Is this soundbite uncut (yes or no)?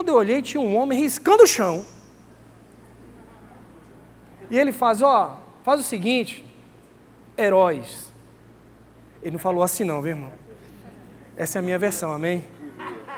yes